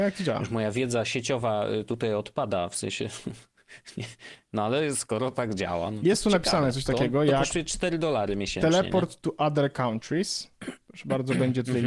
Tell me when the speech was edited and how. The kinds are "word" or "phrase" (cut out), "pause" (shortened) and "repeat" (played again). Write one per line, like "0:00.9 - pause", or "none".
none